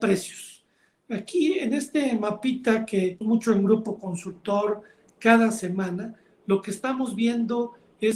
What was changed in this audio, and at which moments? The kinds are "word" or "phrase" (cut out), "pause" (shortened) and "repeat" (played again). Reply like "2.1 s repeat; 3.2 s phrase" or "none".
3.2 s word